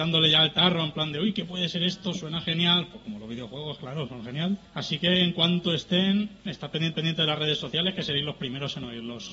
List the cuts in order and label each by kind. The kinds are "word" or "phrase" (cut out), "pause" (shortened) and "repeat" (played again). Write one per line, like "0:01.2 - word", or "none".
0:04.7 - pause
0:06.9 - repeat